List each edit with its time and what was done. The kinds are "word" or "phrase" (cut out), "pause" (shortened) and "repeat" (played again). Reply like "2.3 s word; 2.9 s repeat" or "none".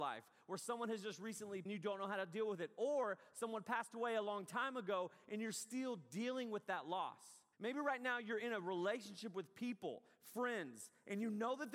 1.7 s phrase; 7.5 s pause